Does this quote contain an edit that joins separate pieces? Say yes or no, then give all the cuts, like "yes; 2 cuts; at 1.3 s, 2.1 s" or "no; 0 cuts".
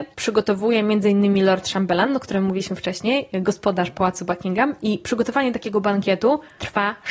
no; 0 cuts